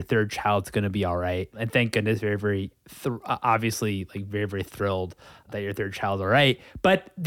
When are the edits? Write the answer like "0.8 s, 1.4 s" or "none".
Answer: none